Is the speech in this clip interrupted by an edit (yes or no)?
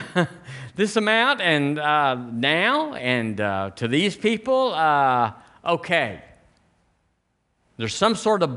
no